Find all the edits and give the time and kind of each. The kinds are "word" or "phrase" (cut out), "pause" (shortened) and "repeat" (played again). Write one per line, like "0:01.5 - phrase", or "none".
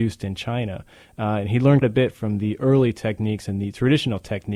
0:01.8 - word